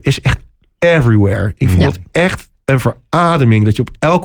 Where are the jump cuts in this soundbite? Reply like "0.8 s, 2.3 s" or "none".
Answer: 2.5 s